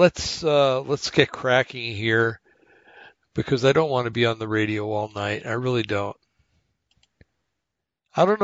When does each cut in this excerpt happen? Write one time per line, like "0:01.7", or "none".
none

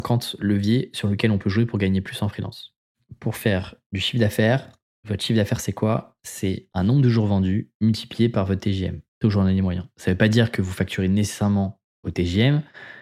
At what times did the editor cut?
0:04.9
0:09.1

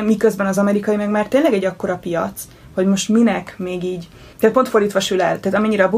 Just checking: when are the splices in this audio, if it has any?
0:04.3

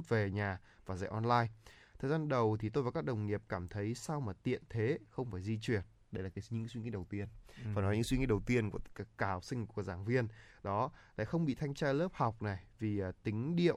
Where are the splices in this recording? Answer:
none

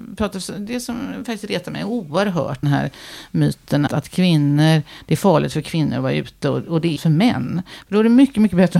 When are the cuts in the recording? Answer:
0:02.6
0:03.9
0:07.0

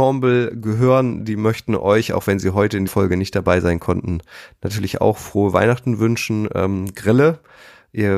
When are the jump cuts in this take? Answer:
0:02.9

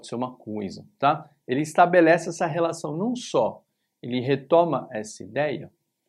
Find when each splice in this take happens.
none

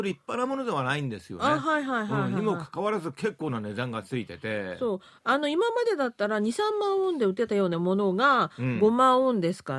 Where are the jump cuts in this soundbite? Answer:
none

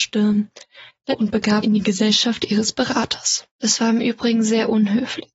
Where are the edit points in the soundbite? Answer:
0:01.1
0:01.6
0:03.5

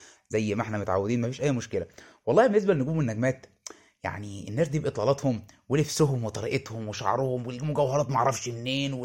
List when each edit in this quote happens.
none

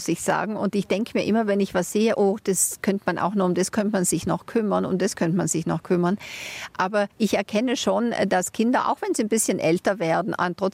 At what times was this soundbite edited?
0:07.1

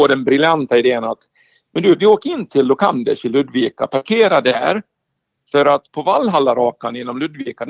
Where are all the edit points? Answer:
none

